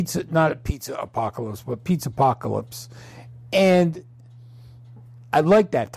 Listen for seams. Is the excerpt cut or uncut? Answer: uncut